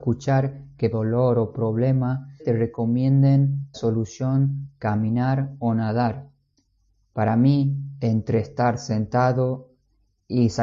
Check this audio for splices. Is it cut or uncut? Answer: cut